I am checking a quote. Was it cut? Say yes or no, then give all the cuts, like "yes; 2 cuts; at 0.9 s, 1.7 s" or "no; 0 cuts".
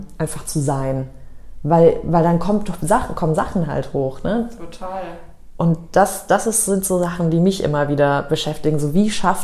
no; 0 cuts